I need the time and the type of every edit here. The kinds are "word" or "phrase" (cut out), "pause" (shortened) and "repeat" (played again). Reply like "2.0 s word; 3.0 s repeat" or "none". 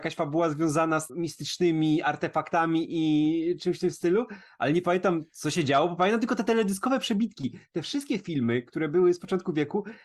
1.1 s word